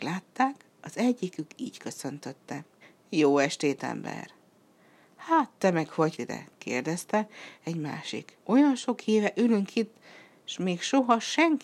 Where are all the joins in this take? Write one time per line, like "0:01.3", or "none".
0:02.8
0:06.2
0:08.4